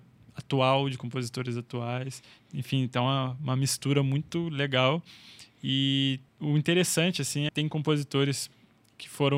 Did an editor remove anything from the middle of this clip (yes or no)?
yes